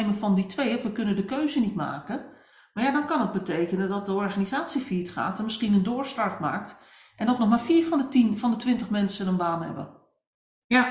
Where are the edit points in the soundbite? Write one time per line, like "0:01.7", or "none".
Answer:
none